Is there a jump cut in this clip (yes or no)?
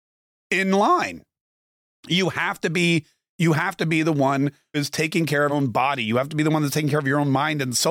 yes